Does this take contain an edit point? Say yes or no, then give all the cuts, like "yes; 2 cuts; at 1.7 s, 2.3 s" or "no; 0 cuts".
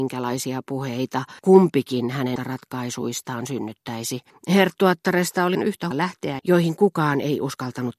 yes; 6 cuts; at 1.4 s, 2.4 s, 4.3 s, 5.5 s, 5.9 s, 6.4 s